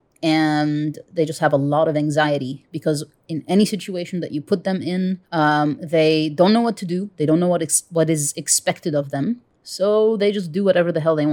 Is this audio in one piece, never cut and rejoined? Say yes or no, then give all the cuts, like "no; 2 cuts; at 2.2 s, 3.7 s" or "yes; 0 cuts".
no; 1 cut; at 5.3 s